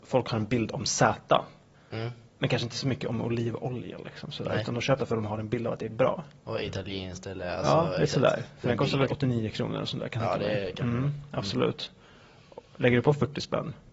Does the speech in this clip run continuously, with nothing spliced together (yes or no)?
no